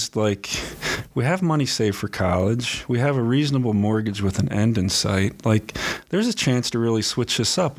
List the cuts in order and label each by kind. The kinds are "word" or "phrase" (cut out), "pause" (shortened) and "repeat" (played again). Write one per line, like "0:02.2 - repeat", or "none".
none